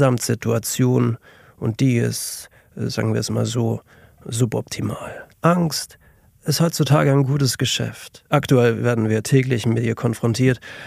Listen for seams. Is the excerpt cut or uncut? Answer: cut